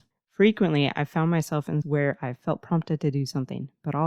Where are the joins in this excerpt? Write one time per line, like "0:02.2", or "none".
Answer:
0:01.8